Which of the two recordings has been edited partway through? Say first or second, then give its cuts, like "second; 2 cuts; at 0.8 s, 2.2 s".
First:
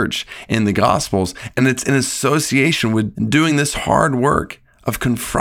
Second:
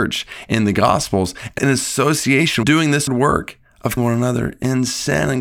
second; 4 cuts; at 1.6 s, 2.6 s, 3.1 s, 4.0 s